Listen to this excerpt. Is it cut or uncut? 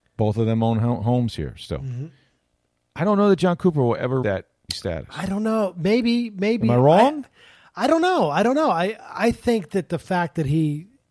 cut